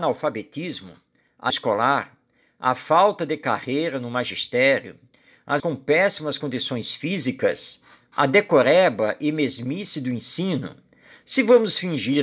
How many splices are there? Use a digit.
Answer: 2